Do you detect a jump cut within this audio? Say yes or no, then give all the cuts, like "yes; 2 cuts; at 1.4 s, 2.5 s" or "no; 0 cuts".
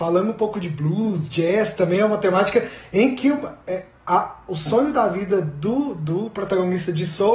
no; 0 cuts